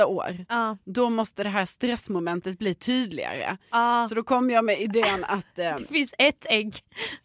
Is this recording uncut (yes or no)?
yes